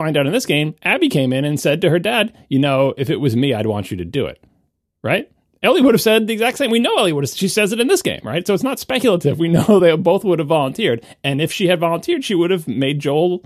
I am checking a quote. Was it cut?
no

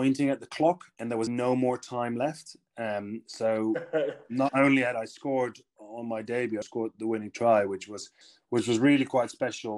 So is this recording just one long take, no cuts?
no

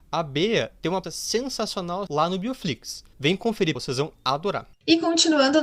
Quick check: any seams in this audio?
yes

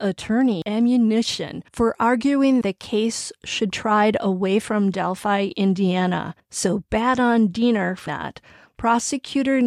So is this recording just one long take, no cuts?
no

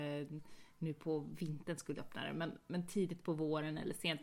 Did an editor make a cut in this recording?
yes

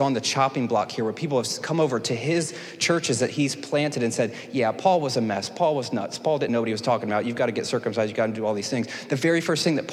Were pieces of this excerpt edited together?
yes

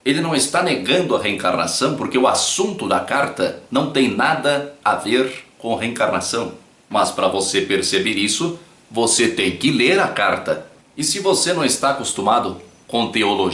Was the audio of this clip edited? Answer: no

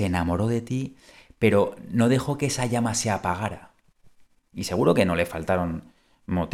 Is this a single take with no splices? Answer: yes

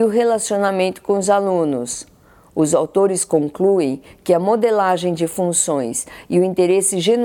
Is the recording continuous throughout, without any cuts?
yes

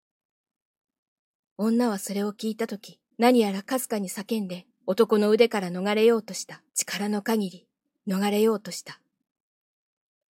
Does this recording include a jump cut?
yes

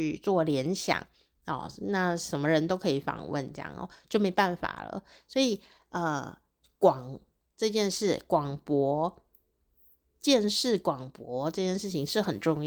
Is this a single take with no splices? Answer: yes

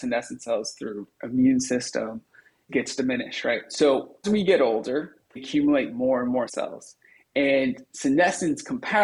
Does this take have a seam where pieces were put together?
yes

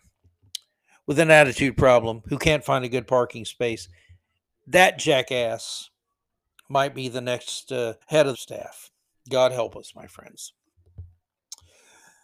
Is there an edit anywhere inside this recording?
yes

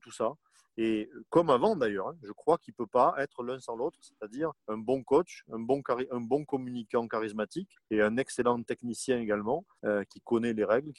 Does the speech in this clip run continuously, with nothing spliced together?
no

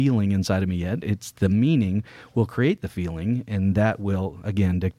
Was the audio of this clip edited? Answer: no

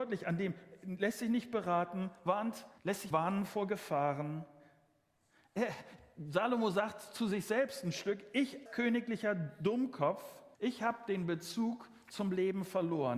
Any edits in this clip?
yes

